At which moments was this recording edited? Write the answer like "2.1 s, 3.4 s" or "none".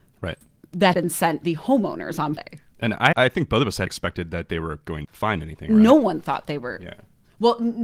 0.9 s, 1.4 s, 2.4 s, 3.1 s, 3.9 s, 5.0 s